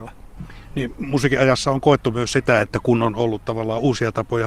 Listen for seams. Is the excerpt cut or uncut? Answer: uncut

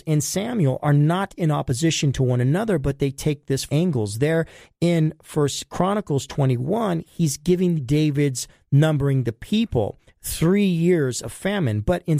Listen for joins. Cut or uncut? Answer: cut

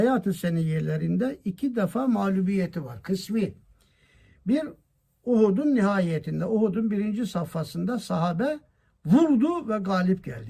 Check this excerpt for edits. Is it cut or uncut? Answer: uncut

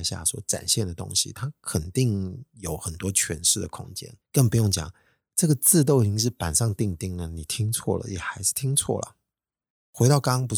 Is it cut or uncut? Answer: cut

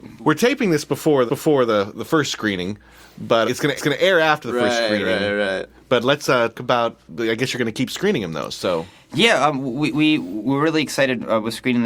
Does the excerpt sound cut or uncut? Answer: cut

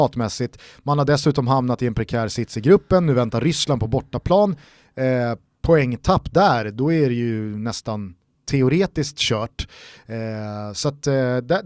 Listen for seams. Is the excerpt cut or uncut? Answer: uncut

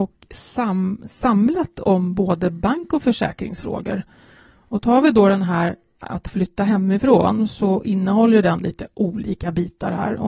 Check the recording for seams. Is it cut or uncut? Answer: uncut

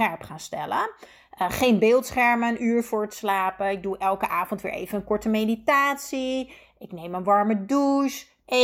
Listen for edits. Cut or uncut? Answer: uncut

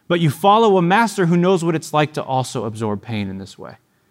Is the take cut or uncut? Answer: uncut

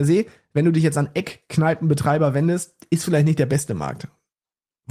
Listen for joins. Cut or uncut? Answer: uncut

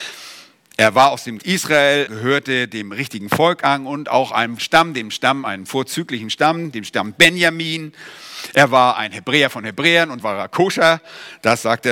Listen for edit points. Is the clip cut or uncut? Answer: cut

